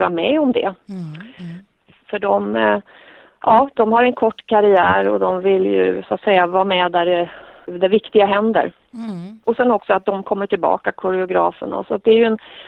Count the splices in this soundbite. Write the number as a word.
zero